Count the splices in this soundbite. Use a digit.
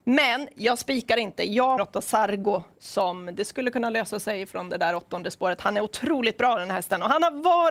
1